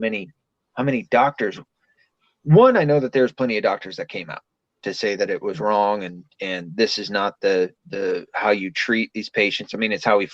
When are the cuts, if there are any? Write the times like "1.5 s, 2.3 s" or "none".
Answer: none